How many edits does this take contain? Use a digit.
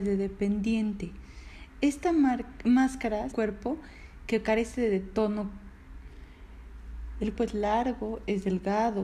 2